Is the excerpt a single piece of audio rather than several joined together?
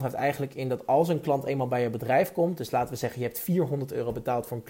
yes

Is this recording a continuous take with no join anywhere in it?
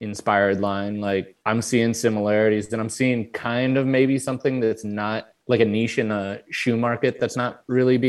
no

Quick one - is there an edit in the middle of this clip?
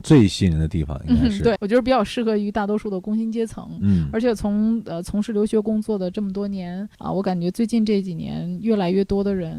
yes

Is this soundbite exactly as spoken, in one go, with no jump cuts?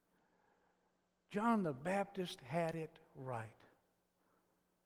yes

